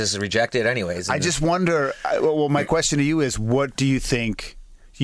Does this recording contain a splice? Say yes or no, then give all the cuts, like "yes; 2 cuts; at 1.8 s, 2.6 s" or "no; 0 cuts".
no; 0 cuts